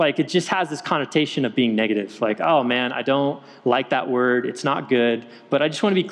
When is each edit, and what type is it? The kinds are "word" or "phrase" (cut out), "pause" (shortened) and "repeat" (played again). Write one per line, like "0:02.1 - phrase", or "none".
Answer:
none